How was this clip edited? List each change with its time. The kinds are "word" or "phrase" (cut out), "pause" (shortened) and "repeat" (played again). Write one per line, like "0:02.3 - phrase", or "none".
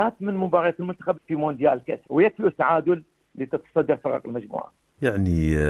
0:01.1 - word
0:02.0 - word
0:02.5 - word